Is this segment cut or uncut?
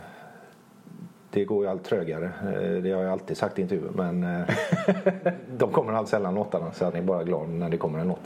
cut